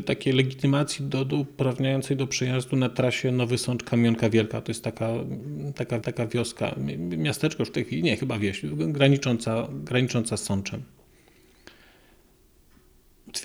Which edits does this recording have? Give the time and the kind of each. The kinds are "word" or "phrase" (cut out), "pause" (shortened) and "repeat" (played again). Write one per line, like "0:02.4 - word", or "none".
0:06.0 - repeat